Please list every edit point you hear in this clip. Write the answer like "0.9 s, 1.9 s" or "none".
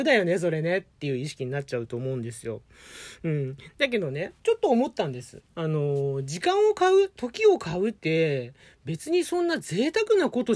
4.4 s, 5.5 s, 8.0 s